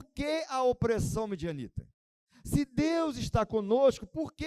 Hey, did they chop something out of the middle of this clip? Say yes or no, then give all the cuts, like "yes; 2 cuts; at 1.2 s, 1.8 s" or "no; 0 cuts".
no; 0 cuts